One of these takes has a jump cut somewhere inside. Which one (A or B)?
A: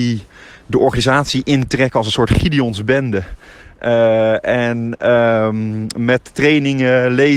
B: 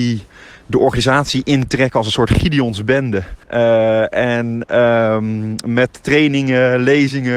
B